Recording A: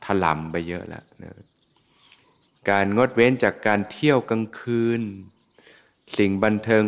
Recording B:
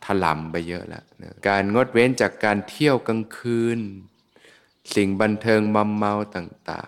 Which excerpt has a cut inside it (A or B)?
B